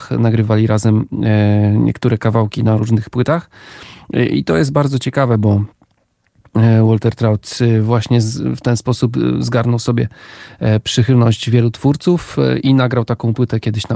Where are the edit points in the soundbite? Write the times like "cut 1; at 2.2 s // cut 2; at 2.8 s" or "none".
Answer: none